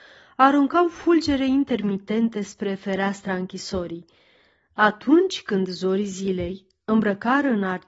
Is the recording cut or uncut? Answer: uncut